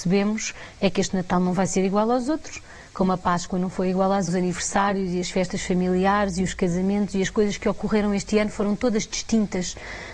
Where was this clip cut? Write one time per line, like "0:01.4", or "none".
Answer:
0:04.3